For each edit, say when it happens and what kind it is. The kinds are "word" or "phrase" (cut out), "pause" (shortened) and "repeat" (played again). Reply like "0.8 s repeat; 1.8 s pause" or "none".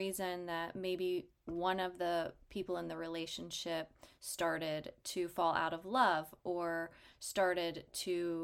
none